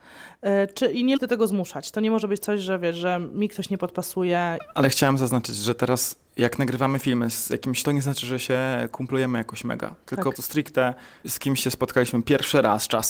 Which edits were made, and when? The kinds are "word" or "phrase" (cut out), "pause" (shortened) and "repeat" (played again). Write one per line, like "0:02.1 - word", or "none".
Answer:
0:01.2 - word
0:07.8 - word
0:10.3 - word
0:11.2 - word